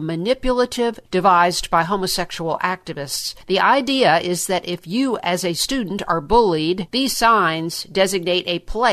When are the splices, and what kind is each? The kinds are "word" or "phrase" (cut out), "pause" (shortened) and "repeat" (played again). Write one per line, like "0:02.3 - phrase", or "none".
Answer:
0:01.1 - word